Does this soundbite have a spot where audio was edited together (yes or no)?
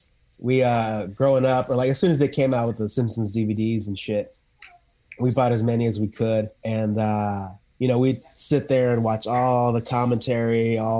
yes